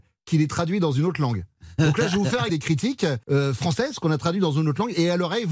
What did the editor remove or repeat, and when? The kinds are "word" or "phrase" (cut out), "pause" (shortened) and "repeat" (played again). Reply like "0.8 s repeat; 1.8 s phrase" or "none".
2.5 s word; 3.2 s pause